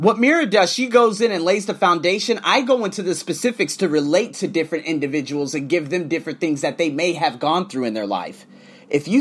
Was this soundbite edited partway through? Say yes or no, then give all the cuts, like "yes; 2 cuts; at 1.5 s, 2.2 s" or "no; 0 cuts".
no; 0 cuts